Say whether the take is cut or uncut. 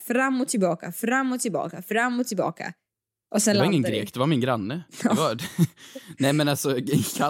uncut